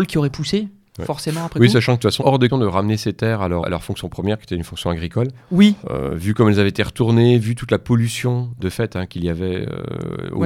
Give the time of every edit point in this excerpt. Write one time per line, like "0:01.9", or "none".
0:02.2
0:02.5
0:03.6
0:05.8
0:08.6